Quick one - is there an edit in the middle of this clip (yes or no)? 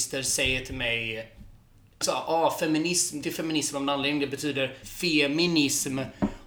yes